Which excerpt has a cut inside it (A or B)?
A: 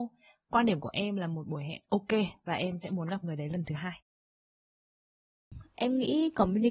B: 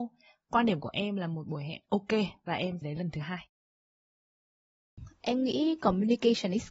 B